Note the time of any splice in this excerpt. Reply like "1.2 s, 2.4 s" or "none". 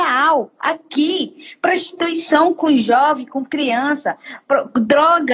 none